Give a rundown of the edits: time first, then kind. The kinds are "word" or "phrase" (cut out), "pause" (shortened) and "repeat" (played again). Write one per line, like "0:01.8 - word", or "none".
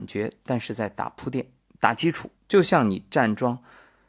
0:01.6 - pause
0:02.4 - pause